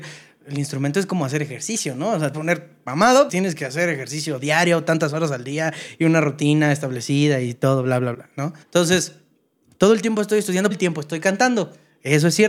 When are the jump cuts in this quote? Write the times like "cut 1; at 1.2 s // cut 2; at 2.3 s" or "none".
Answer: cut 1; at 2.3 s // cut 2; at 3.3 s // cut 3; at 8.1 s // cut 4; at 8.6 s // cut 5; at 10.7 s